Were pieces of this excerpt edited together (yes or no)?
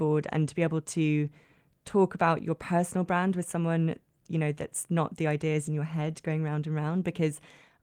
no